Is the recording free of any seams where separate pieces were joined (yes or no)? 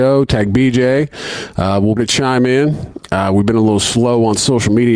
no